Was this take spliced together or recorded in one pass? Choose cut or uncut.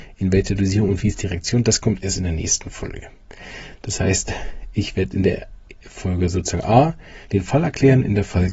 cut